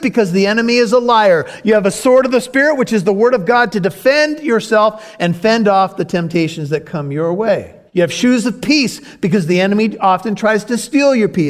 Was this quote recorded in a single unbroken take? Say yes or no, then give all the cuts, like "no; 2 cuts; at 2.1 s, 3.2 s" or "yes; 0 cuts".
no; 1 cut; at 7.9 s